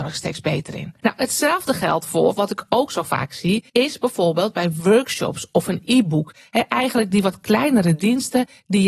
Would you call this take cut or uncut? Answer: cut